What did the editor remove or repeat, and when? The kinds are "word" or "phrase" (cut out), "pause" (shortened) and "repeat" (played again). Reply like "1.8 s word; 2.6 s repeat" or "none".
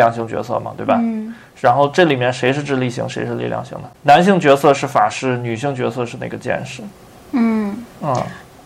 3.9 s pause